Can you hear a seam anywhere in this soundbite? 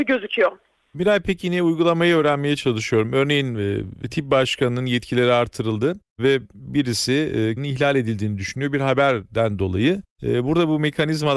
yes; 1 cut; at 7.6 s

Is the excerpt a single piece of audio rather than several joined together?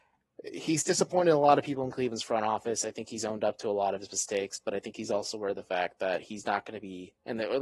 yes; 0 cuts

